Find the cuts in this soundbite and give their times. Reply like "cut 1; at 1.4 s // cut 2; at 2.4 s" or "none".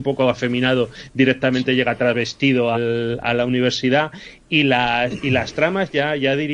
cut 1; at 2.7 s